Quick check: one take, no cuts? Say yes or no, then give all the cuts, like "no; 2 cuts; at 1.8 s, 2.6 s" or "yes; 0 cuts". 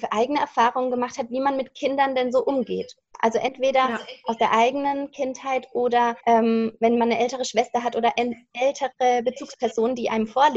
no; 1 cut; at 6.2 s